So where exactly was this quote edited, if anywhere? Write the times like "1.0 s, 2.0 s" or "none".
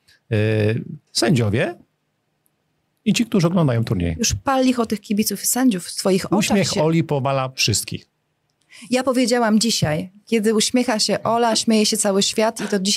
1.1 s